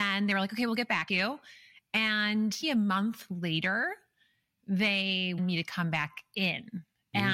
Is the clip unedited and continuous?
no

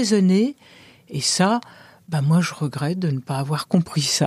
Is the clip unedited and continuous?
yes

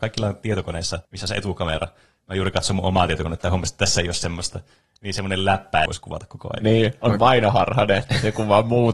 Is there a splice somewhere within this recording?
yes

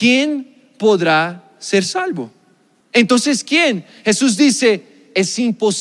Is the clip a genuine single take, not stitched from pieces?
yes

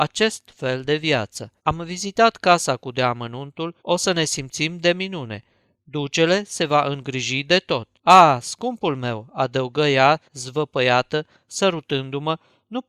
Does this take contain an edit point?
yes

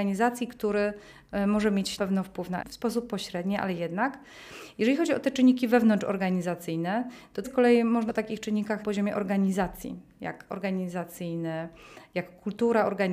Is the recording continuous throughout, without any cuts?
no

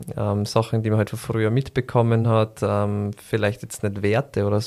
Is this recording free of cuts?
yes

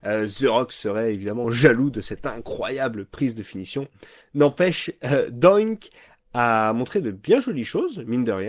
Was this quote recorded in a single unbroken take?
yes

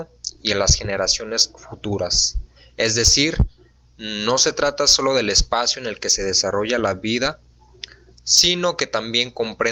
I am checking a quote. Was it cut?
no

